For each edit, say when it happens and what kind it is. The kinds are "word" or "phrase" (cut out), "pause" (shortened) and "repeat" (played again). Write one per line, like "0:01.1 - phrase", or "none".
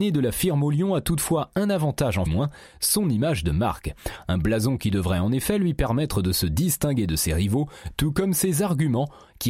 0:02.3 - phrase